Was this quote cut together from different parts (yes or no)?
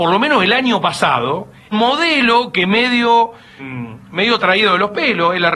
yes